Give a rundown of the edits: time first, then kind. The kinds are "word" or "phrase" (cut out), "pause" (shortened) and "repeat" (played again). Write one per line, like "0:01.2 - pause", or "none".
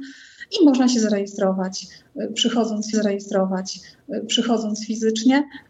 0:02.9 - repeat